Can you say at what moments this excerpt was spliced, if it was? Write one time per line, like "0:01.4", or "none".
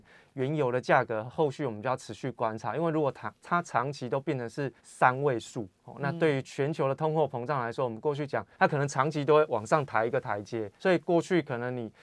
0:04.8
0:08.5
0:10.8